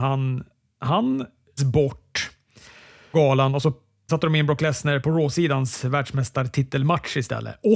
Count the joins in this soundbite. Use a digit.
4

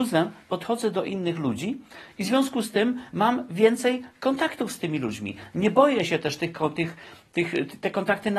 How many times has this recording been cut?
0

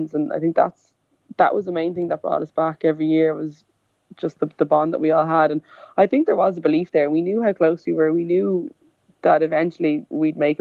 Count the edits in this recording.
0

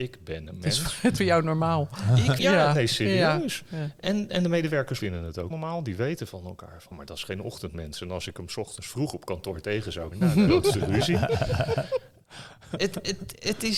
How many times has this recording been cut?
7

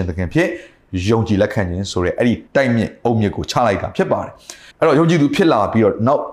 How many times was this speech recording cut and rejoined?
2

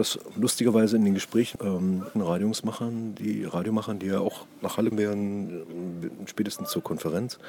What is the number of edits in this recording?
3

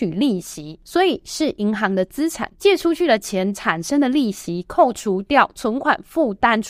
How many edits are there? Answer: 1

